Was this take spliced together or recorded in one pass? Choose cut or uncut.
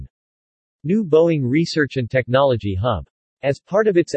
uncut